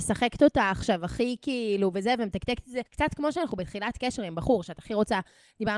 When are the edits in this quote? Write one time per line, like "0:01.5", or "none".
0:02.9